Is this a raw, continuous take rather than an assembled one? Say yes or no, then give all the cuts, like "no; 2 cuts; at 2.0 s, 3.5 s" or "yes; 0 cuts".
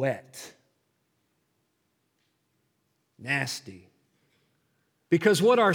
yes; 0 cuts